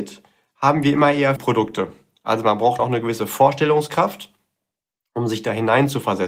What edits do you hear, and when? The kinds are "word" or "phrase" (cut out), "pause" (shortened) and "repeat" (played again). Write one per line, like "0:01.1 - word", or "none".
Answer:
0:01.4 - word
0:02.8 - word